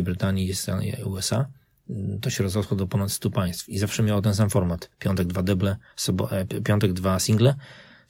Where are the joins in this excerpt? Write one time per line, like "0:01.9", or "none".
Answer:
none